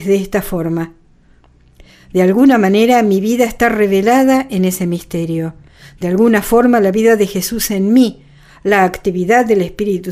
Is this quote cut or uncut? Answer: uncut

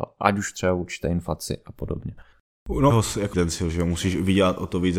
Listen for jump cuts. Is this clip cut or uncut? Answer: cut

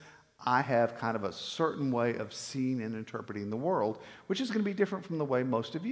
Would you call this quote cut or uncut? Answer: uncut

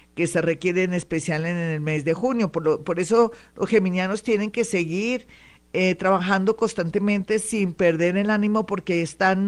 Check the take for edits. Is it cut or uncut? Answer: uncut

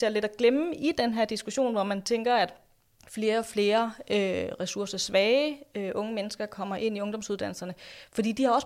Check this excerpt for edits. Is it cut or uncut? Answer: uncut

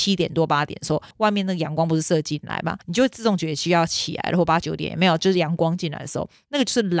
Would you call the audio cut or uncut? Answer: cut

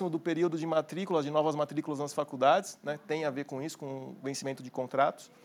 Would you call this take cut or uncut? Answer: uncut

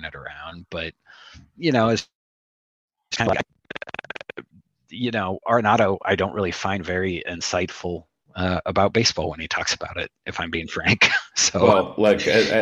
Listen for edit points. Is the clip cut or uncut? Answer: uncut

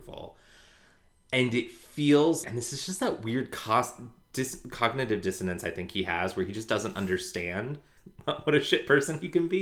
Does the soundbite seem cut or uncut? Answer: cut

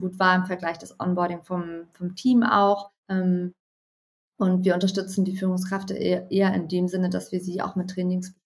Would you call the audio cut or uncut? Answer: cut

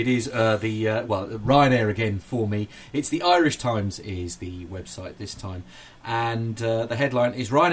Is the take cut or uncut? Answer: uncut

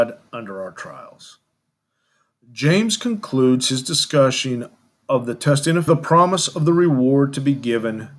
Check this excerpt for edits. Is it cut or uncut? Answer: cut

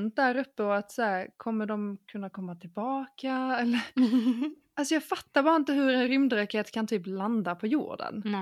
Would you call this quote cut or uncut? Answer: uncut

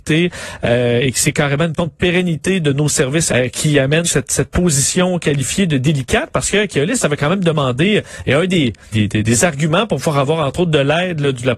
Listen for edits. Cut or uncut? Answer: cut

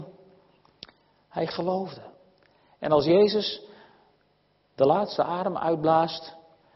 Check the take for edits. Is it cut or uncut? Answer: uncut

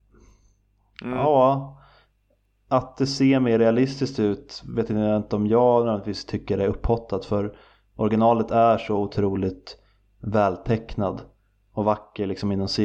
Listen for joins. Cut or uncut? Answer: uncut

